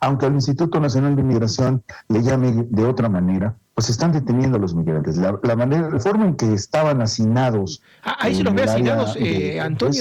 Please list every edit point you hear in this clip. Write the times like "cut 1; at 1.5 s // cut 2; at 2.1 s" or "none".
cut 1; at 3.6 s